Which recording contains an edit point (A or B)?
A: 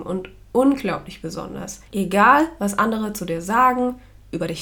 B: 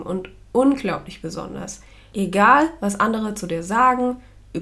A